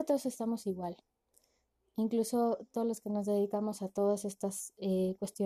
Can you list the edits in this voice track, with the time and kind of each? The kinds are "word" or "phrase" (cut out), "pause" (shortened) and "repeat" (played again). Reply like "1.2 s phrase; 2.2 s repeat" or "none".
none